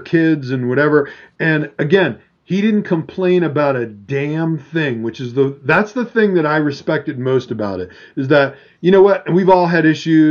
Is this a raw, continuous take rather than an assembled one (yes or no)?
yes